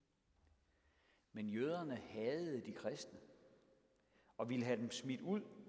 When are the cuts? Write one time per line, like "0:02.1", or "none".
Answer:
none